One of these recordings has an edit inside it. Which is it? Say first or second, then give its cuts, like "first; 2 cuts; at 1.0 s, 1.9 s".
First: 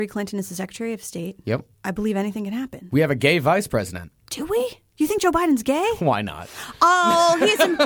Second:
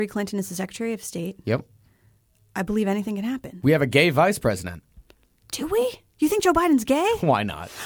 first; 2 cuts; at 1.7 s, 4.2 s